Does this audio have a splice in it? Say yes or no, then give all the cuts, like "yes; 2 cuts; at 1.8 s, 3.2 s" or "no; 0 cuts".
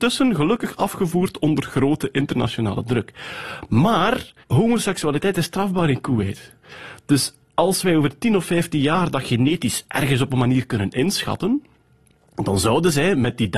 yes; 2 cuts; at 4.4 s, 7.4 s